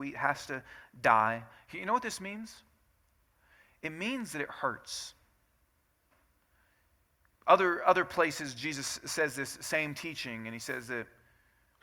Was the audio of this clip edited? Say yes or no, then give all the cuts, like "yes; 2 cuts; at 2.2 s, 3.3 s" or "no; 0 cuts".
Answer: no; 0 cuts